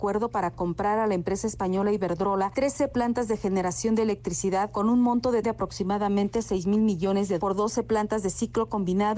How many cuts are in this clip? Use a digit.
2